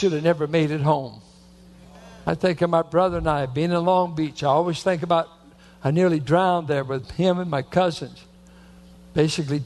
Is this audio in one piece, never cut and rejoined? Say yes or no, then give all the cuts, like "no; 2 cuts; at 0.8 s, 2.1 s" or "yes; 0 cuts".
yes; 0 cuts